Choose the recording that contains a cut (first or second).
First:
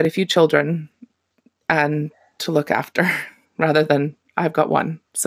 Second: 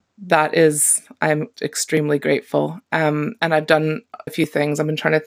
second